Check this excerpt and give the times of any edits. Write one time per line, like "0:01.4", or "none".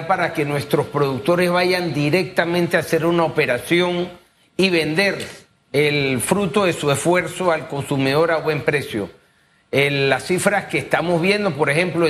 none